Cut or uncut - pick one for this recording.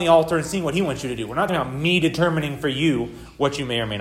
cut